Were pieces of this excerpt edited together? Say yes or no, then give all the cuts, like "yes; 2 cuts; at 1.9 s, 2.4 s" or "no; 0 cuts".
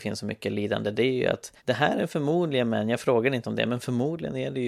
yes; 1 cut; at 1.6 s